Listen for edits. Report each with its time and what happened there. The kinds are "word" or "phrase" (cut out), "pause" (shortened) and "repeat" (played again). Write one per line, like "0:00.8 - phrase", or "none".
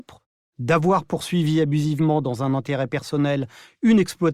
none